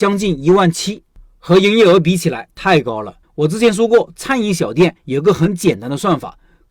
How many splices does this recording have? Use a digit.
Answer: 2